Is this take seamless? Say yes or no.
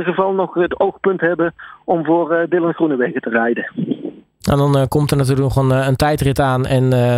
yes